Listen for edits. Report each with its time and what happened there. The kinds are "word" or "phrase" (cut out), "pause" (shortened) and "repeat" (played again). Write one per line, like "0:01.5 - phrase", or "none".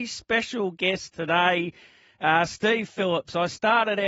none